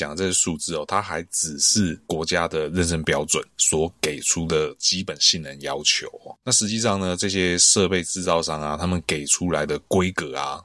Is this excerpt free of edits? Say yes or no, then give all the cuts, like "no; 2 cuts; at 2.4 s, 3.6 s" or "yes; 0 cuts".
no; 2 cuts; at 2.0 s, 3.5 s